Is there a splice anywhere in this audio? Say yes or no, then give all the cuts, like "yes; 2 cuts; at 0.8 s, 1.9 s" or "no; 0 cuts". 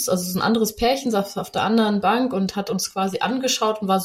no; 0 cuts